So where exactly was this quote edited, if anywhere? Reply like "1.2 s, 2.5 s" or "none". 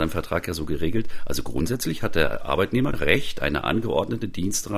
2.9 s